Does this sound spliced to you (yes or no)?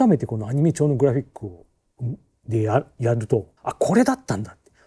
yes